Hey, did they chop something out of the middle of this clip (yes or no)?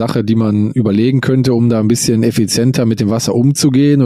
no